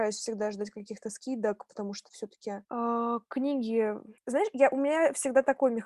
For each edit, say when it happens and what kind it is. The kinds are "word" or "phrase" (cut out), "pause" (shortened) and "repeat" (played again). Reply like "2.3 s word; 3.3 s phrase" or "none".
2.6 s pause; 4.2 s pause